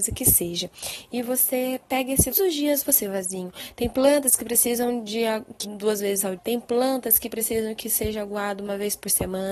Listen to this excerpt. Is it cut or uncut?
cut